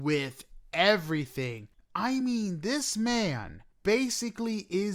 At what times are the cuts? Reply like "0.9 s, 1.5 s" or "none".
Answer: none